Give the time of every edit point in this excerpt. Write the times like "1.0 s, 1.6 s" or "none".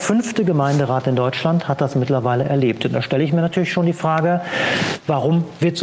none